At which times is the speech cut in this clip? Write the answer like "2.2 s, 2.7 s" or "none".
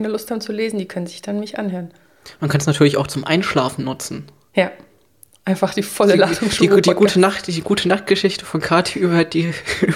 none